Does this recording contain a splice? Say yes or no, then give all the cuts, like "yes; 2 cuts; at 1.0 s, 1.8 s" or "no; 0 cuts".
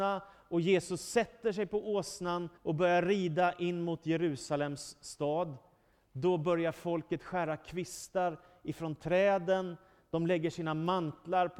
yes; 1 cut; at 2.6 s